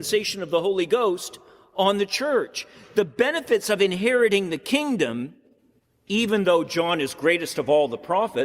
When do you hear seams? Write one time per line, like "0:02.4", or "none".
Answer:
none